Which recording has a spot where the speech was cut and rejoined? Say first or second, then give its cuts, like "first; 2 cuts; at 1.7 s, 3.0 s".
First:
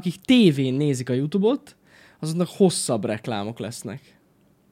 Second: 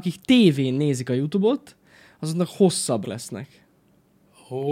second; 1 cut; at 3.0 s